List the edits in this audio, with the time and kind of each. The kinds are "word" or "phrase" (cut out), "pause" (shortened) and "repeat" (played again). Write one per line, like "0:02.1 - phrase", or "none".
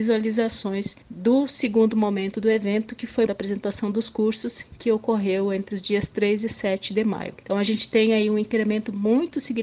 0:01.0 - pause
0:03.3 - phrase
0:07.4 - pause